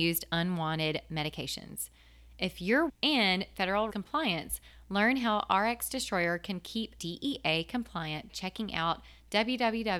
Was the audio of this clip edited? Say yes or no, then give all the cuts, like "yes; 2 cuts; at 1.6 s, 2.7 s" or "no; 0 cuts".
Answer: yes; 4 cuts; at 2.9 s, 3.9 s, 7.0 s, 8.3 s